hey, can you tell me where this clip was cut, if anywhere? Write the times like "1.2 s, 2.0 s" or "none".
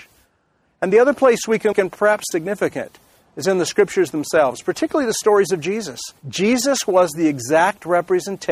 1.7 s, 2.3 s, 6.2 s